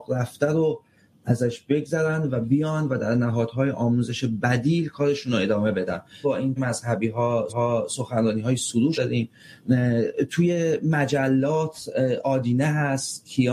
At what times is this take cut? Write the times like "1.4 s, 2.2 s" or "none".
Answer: 6.2 s, 6.6 s, 7.5 s, 8.9 s